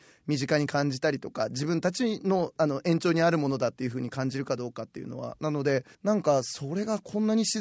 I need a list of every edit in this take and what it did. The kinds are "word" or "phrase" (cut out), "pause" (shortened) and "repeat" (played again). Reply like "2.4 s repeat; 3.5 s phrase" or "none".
5.9 s pause